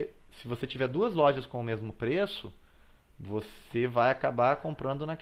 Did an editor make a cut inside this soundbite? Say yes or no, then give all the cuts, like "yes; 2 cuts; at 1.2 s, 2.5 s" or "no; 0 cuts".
no; 0 cuts